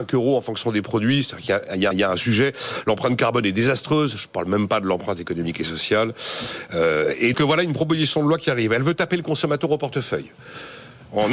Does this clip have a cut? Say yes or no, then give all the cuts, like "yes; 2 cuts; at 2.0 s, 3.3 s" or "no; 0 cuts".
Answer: yes; 2 cuts; at 1.9 s, 7.3 s